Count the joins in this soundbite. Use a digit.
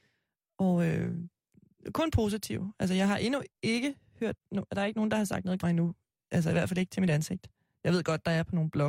1